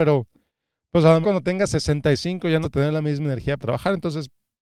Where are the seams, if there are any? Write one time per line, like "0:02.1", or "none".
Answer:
0:01.2
0:02.6
0:03.6